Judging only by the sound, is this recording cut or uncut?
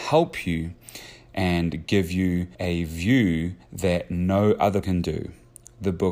cut